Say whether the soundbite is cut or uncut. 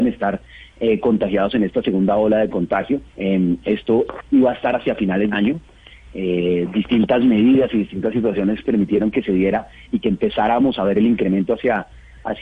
cut